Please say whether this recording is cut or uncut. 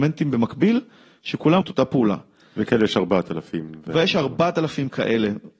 cut